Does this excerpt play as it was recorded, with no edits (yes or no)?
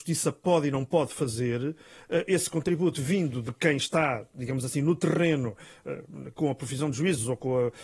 yes